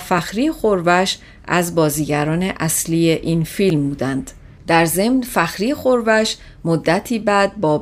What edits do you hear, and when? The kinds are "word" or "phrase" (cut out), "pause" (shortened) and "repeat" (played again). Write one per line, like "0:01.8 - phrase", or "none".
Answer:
none